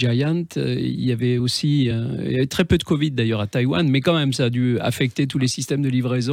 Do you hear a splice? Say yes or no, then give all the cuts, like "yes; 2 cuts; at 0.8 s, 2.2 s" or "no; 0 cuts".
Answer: no; 0 cuts